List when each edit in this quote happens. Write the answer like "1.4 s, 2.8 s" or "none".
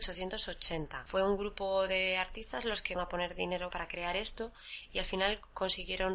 3.0 s, 3.7 s